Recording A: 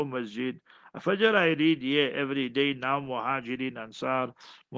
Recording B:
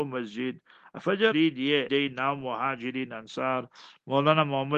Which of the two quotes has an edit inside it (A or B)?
B